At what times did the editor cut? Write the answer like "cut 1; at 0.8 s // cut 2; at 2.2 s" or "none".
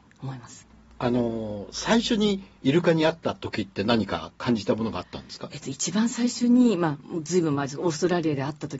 cut 1; at 2.6 s